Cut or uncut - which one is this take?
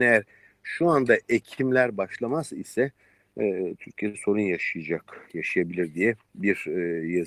uncut